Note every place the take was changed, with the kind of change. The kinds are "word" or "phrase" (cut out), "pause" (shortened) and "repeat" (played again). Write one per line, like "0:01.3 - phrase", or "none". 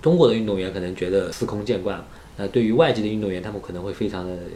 none